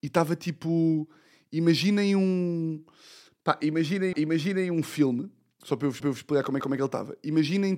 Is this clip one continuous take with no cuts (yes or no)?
no